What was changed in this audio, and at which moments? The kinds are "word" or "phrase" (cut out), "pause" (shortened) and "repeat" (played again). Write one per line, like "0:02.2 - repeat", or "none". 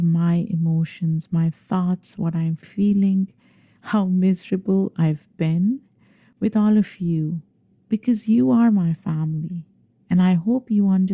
none